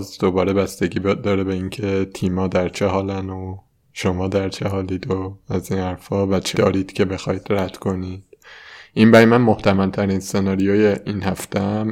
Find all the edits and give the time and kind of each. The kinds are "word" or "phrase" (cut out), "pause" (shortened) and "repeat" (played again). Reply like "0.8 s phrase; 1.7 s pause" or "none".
6.5 s word